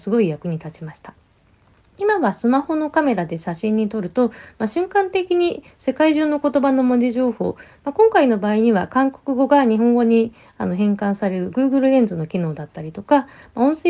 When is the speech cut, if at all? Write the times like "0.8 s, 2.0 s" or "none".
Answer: none